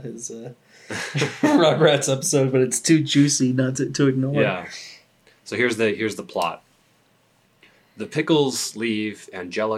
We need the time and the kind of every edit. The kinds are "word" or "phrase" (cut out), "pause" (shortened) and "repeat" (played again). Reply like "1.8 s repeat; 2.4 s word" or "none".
none